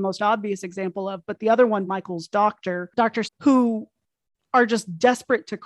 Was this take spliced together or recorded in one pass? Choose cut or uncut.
cut